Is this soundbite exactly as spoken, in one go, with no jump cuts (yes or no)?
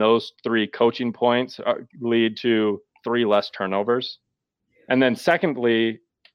yes